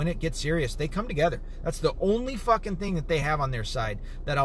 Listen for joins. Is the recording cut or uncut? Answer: uncut